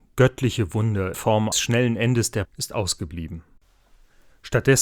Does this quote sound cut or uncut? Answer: cut